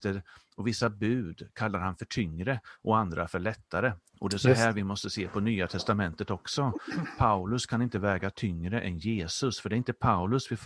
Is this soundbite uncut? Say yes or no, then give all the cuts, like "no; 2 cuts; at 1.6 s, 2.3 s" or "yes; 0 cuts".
no; 1 cut; at 4.0 s